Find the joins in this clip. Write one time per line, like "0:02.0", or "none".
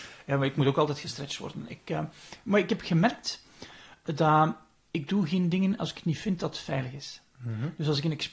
none